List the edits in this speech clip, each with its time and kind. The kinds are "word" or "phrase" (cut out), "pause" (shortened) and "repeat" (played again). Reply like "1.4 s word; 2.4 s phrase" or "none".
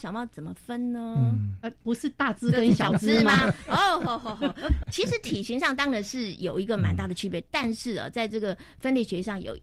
4.8 s word